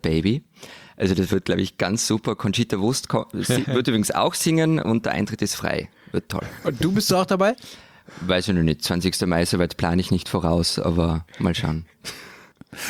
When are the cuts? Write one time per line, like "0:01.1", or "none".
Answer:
none